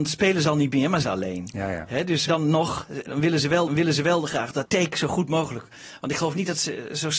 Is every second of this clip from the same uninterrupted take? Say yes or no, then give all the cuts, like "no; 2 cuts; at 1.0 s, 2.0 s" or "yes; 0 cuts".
no; 5 cuts; at 1.0 s, 2.3 s, 3.1 s, 3.7 s, 4.7 s